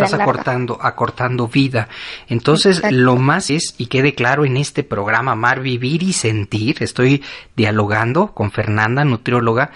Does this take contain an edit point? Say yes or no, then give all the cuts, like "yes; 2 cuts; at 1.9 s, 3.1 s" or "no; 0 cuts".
yes; 2 cuts; at 3.5 s, 3.9 s